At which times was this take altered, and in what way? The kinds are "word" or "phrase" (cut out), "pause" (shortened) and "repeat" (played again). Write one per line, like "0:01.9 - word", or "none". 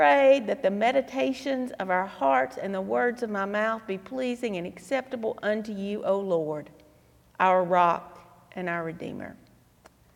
none